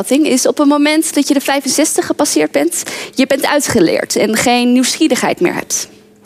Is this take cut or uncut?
uncut